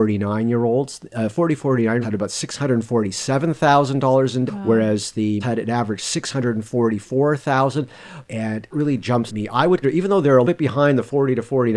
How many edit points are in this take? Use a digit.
7